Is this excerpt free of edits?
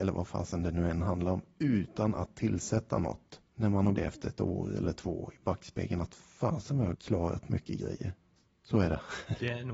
no; 3 cuts; at 3.5 s, 3.9 s, 6.9 s

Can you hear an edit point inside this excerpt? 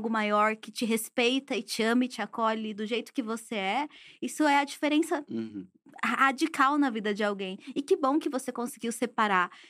no; 0 cuts

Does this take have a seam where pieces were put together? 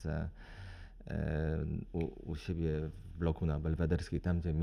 no; 0 cuts

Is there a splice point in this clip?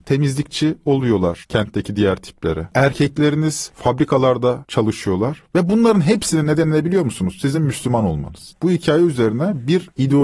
no; 0 cuts

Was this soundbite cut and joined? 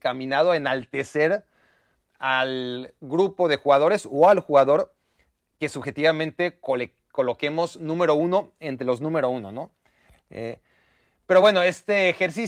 no; 0 cuts

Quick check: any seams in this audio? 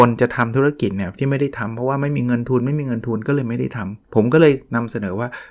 yes; 1 cut; at 4.0 s

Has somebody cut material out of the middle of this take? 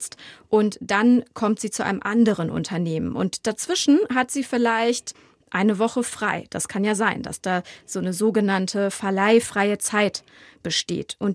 no; 0 cuts

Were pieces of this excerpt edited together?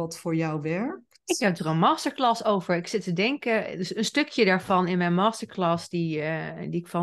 yes; 1 cut; at 3.1 s

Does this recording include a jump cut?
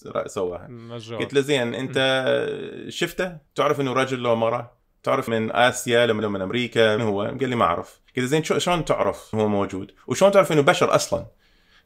yes; 6 cuts; at 3.5 s, 5.3 s, 6.2 s, 7.0 s, 8.1 s, 9.3 s

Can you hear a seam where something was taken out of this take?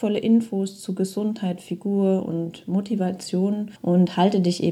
yes; 1 cut; at 3.8 s

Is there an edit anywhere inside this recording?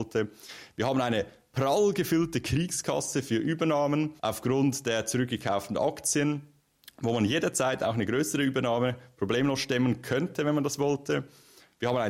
yes; 1 cut; at 4.2 s

